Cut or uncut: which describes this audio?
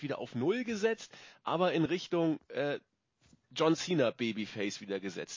uncut